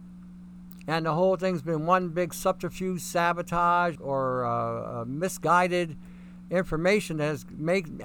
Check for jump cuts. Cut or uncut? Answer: cut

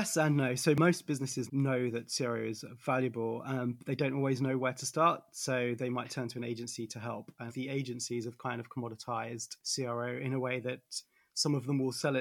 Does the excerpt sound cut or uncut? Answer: cut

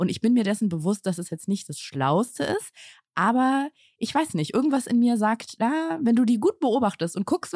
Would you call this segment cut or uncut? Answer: uncut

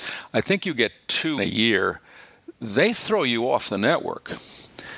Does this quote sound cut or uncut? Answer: cut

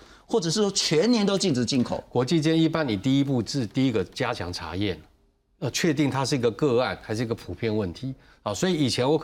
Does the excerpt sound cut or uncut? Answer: uncut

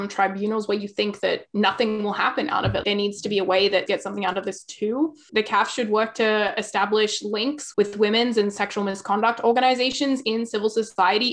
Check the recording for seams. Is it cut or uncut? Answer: cut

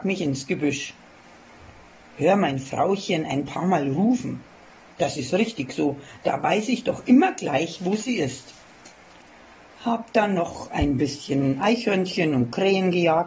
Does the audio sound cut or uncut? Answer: uncut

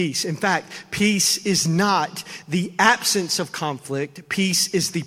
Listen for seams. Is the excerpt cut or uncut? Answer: uncut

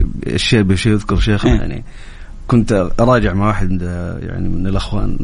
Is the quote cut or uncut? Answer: uncut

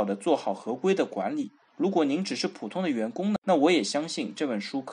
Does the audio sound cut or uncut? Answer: cut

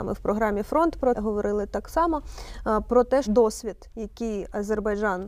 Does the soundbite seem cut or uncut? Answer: cut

